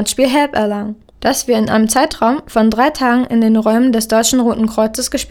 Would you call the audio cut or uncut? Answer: uncut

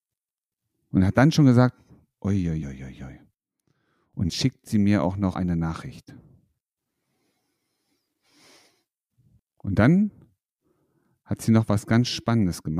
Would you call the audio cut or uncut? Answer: cut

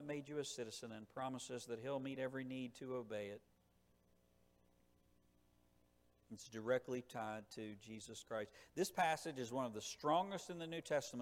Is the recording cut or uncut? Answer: uncut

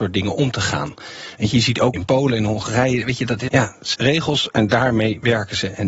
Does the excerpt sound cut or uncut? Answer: cut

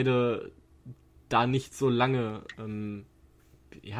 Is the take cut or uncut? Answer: uncut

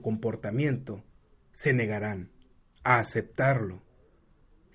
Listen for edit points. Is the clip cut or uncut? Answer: uncut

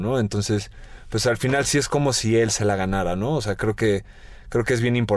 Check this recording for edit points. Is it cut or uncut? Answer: uncut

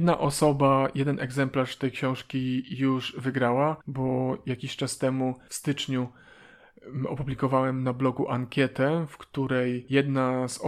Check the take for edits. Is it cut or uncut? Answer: cut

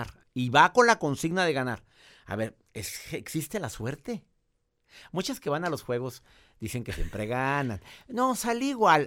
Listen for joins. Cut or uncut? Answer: uncut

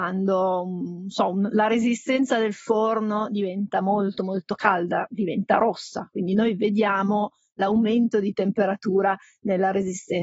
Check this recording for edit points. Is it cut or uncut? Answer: uncut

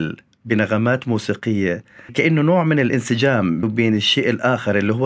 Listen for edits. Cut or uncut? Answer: cut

